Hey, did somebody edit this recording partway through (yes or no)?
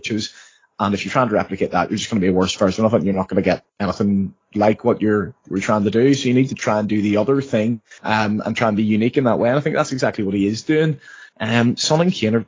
yes